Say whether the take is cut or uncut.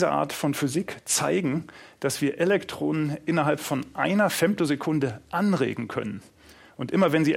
uncut